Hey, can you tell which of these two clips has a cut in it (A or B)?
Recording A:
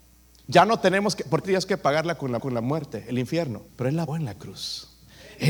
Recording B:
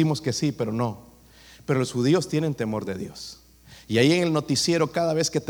A